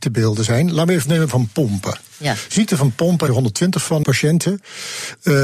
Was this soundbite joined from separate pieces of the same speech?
yes; 3 cuts; at 1.1 s, 3.3 s, 4.0 s

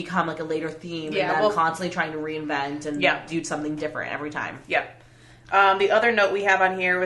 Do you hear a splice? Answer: no; 0 cuts

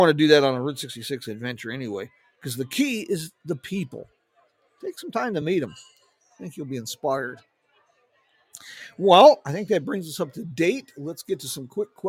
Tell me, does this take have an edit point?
no; 0 cuts

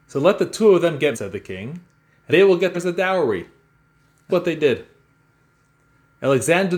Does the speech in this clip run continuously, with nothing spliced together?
no; 4 cuts; at 1.1 s, 2.3 s, 2.7 s, 4.3 s

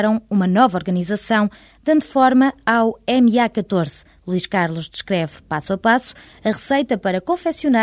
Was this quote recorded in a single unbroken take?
yes; 0 cuts

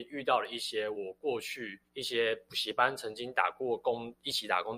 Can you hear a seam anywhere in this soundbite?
yes; 1 cut; at 1.9 s

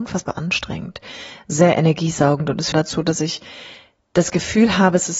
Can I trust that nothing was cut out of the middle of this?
no; 1 cut; at 2.7 s

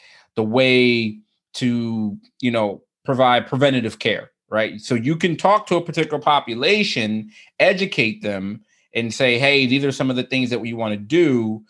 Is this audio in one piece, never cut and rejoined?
yes; 0 cuts

